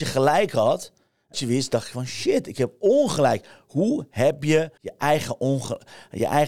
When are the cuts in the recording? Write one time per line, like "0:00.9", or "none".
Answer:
0:01.3
0:04.8